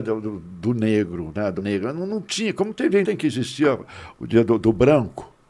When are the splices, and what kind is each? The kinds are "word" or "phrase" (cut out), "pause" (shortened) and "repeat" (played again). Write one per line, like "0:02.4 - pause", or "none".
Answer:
0:01.6 - word
0:03.0 - word